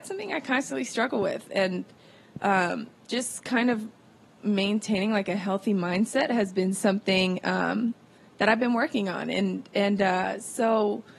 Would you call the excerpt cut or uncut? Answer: uncut